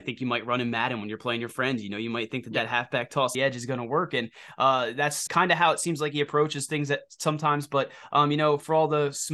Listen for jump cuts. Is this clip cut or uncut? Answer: cut